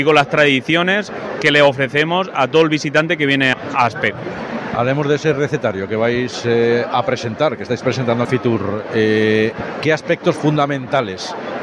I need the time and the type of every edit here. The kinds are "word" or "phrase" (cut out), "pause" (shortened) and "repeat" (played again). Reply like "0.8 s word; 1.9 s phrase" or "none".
3.5 s word; 8.2 s phrase